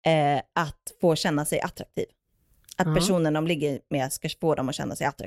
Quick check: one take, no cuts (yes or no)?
yes